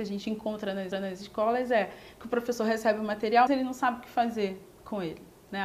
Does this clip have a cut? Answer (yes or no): yes